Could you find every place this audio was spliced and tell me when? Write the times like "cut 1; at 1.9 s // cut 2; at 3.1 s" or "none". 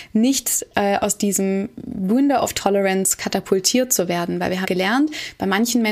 cut 1; at 4.6 s